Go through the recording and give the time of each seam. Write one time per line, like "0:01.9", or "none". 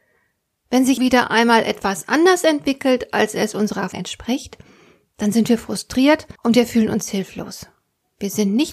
0:01.0
0:03.9
0:06.4